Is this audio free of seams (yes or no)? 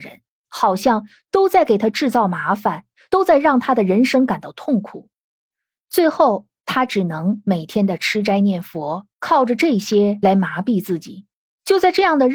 yes